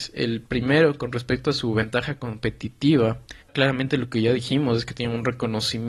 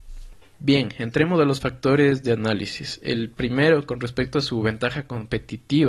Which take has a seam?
first; 1 cut; at 3.4 s

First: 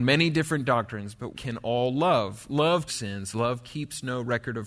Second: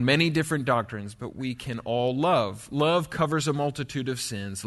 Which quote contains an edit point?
first; 2 cuts; at 1.3 s, 2.9 s

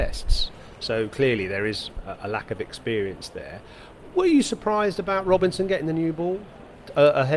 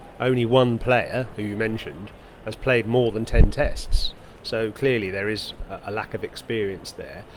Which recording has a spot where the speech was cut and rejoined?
second; 1 cut; at 1.3 s

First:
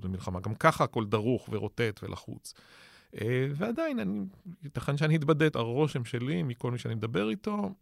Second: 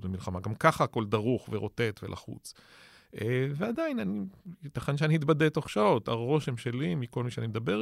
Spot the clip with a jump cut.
first; 1 cut; at 5.5 s

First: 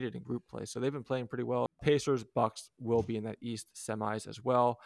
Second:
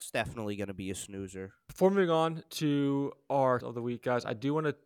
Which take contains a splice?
second; 1 cut; at 3.6 s

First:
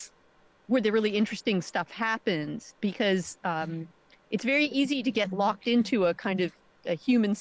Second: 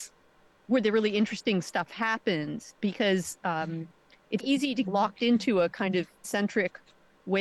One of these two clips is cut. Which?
second; 3 cuts; at 4.4 s, 4.8 s, 6.2 s

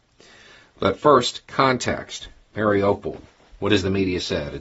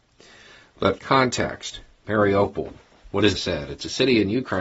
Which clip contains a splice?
second; 2 cuts; at 1.0 s, 3.4 s

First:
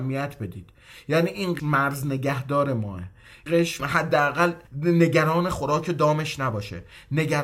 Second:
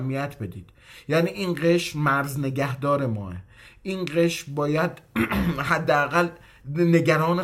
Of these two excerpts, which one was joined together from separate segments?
first; 4 cuts; at 1.6 s, 3.5 s, 3.8 s, 4.7 s

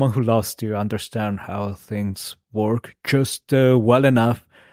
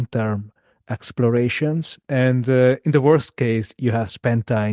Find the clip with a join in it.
second; 1 cut; at 2.0 s

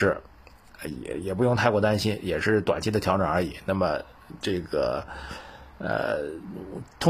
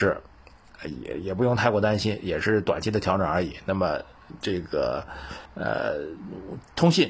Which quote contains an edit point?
second; 1 cut; at 5.5 s

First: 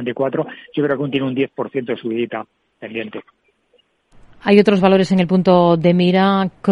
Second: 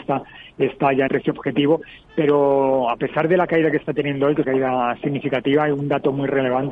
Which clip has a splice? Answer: second; 2 cuts; at 1.1 s, 4.4 s

